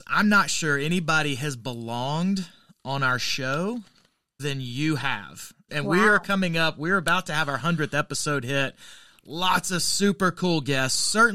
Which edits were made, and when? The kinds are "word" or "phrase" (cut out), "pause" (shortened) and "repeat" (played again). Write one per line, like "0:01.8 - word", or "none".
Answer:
0:04.4 - word
0:05.7 - word